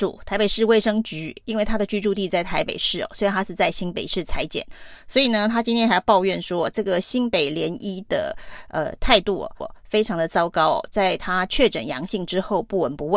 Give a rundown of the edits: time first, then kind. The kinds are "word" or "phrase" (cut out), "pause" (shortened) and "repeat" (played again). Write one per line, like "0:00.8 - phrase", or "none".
0:09.6 - repeat